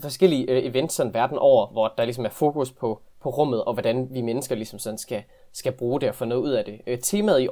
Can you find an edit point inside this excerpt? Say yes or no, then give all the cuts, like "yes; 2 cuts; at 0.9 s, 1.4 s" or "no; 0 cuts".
no; 0 cuts